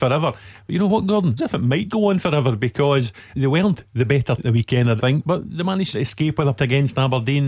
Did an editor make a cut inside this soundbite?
yes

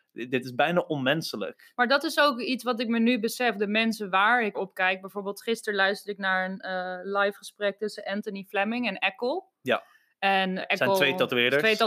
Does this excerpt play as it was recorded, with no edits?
no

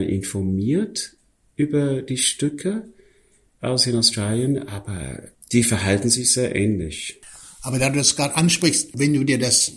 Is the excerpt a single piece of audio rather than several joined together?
yes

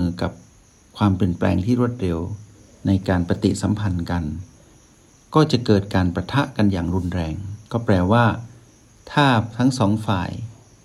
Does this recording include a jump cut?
no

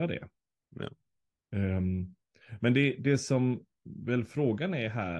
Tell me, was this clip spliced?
no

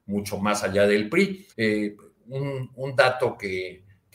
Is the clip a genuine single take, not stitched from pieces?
no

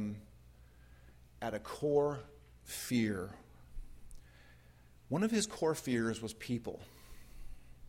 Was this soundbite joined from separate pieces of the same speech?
no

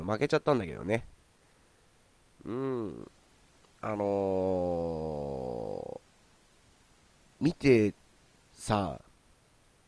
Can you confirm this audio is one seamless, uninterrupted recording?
yes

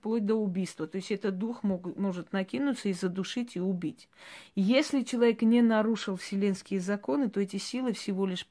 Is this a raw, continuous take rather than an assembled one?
yes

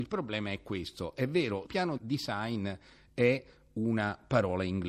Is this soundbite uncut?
no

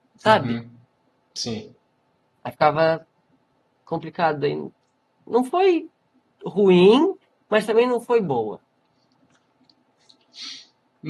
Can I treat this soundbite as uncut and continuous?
yes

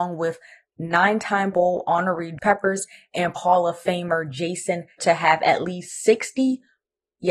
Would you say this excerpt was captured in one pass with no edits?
no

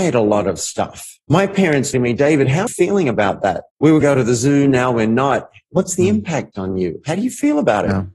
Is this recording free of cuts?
no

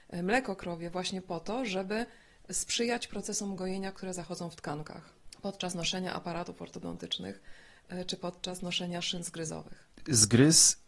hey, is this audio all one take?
yes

